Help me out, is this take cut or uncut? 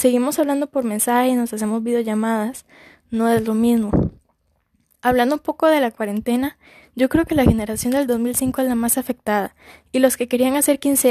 uncut